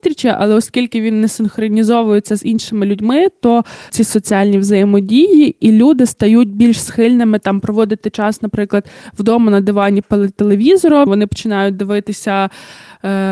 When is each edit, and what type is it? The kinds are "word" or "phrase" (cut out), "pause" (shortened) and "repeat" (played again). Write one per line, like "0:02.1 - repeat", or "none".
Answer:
0:03.9 - word
0:10.4 - word
0:11.1 - word